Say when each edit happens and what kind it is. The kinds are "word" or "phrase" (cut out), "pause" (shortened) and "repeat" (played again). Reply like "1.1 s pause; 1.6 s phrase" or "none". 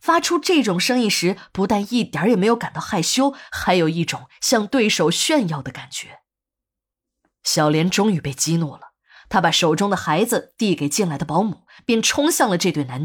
none

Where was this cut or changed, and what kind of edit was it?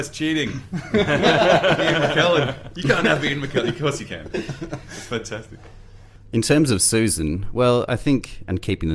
none

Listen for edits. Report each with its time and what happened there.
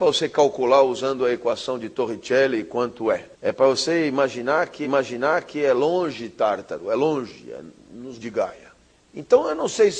3.3 s pause; 4.8 s repeat; 8.2 s word; 8.9 s pause

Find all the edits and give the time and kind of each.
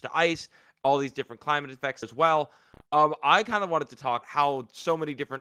2.0 s word; 4.2 s word

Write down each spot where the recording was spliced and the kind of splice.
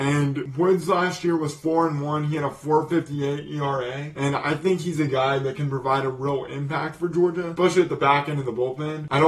none

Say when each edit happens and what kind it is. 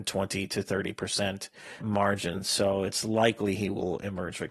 1.8 s word

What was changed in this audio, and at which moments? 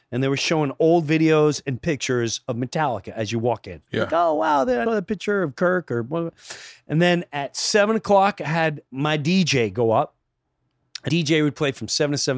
3.9 s pause; 4.9 s phrase; 8.9 s pause; 11.1 s word

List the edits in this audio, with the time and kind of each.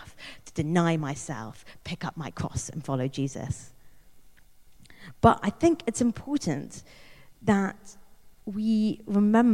none

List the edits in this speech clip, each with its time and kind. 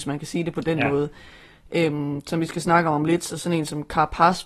none

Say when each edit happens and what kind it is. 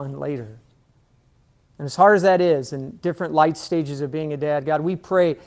none

